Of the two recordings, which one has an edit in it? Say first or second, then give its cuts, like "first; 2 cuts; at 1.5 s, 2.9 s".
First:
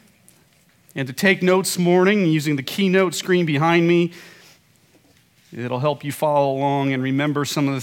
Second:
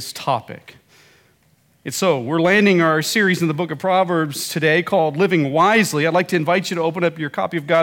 first; 1 cut; at 1.7 s